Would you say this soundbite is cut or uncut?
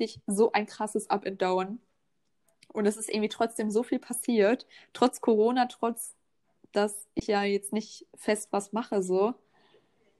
uncut